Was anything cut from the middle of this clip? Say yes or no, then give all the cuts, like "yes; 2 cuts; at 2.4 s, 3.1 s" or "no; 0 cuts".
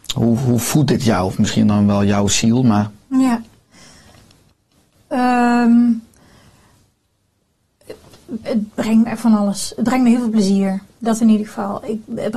yes; 1 cut; at 8.4 s